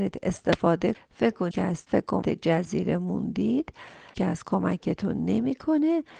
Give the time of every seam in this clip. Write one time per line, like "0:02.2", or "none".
0:00.9
0:01.5
0:01.9
0:02.2
0:04.1